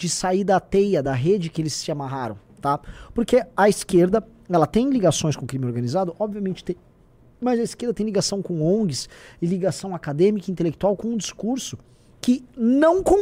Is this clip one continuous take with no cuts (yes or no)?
yes